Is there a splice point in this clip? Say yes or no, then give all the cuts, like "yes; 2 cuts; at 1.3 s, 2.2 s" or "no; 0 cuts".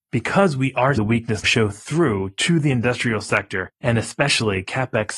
yes; 2 cuts; at 1.0 s, 1.4 s